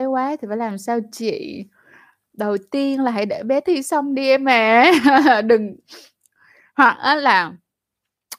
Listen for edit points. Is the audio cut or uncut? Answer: uncut